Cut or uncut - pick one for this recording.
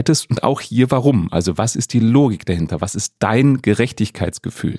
uncut